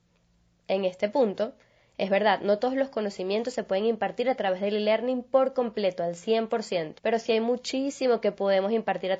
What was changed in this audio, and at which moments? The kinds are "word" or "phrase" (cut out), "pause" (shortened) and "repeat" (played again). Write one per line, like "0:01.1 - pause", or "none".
0:07.0 - pause